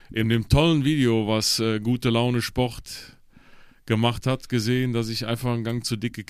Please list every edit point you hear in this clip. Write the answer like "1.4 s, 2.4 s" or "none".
none